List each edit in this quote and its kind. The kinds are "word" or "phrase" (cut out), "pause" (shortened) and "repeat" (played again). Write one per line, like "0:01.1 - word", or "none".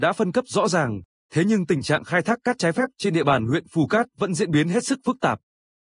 none